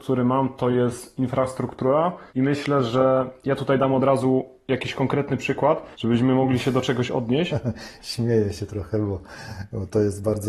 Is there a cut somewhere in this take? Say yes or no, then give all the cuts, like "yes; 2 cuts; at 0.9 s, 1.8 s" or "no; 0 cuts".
yes; 2 cuts; at 2.3 s, 5.9 s